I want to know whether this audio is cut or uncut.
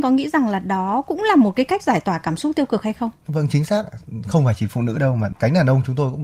uncut